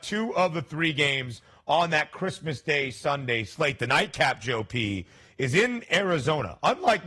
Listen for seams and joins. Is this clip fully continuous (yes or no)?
yes